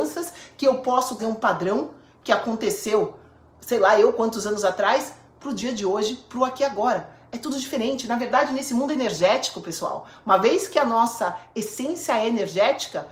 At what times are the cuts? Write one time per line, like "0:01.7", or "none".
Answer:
0:01.2